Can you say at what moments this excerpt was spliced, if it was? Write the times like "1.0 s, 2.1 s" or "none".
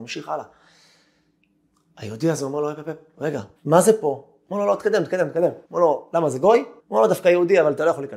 3.6 s, 5.6 s, 6.8 s